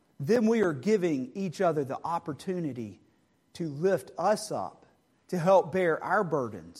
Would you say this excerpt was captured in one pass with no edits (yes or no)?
yes